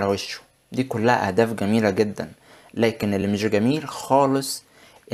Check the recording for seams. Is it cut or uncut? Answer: uncut